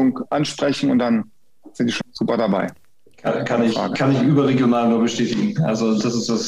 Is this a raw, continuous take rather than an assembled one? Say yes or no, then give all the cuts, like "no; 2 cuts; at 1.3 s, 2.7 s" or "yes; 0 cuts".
no; 1 cut; at 2.0 s